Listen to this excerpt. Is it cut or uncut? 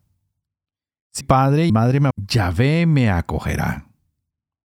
cut